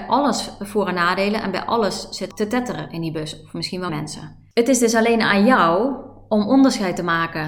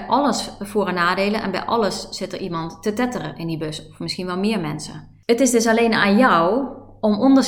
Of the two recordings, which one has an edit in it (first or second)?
first